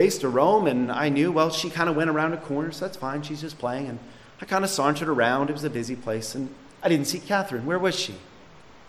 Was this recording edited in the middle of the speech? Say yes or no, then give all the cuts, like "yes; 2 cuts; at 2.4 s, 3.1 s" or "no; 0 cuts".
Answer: no; 0 cuts